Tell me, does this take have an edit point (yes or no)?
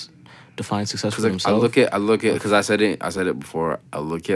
no